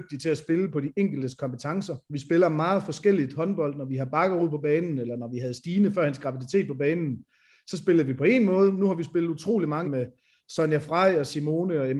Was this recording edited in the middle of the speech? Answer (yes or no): yes